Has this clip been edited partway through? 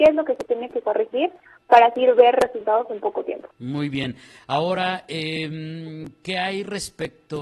yes; 1 cut; at 3.5 s

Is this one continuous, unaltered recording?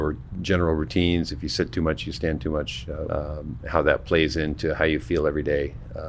no; 1 cut; at 3.1 s

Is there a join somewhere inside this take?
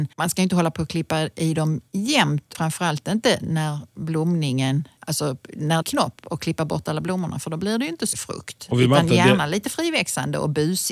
yes; 3 cuts; at 2.5 s, 5.8 s, 8.1 s

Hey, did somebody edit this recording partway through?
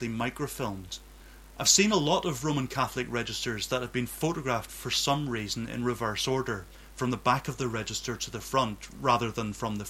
no; 0 cuts

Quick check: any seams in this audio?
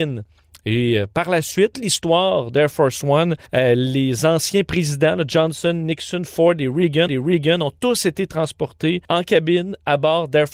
yes; 4 cuts; at 1.7 s, 3.5 s, 7.1 s, 9.0 s

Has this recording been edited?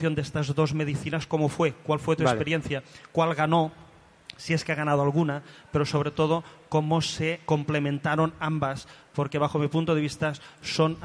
no; 0 cuts

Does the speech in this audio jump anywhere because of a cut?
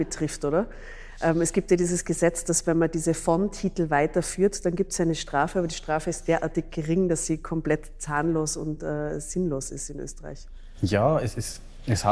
no; 0 cuts

